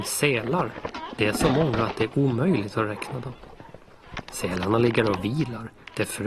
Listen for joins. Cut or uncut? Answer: uncut